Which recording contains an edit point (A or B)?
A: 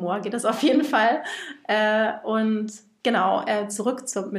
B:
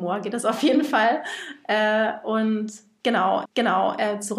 B